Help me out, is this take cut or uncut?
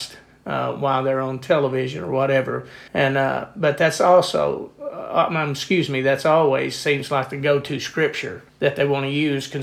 cut